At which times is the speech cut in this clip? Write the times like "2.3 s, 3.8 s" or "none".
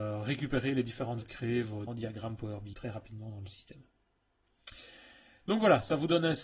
1.2 s, 1.9 s, 2.7 s